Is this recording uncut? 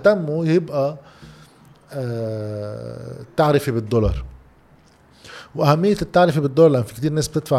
yes; 0 cuts

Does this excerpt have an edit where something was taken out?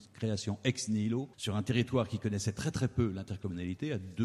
yes; 1 cut; at 1.3 s

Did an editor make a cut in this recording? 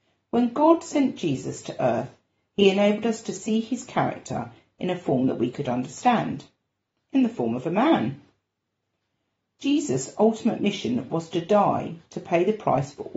no; 0 cuts

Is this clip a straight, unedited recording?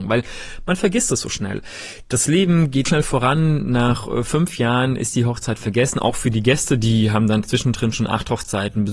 no; 1 cut; at 2.9 s

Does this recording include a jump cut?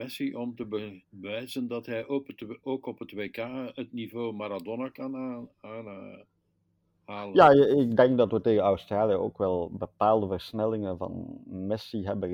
yes; 1 cut; at 1.0 s

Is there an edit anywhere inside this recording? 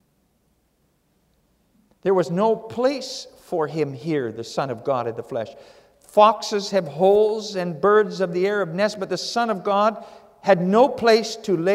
no; 0 cuts

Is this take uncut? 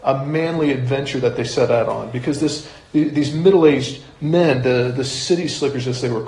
yes; 0 cuts

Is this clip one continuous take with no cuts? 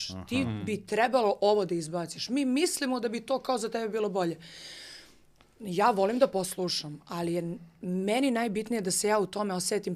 yes; 0 cuts

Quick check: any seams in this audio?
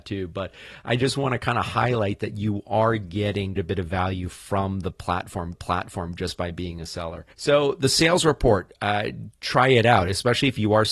yes; 3 cuts; at 3.6 s, 5.5 s, 7.3 s

